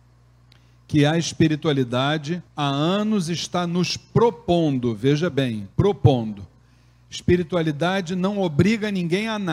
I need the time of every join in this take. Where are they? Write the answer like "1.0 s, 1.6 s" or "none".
2.5 s, 5.7 s